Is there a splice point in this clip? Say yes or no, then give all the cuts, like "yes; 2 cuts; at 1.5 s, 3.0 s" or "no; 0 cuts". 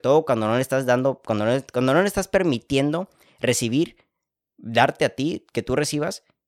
no; 0 cuts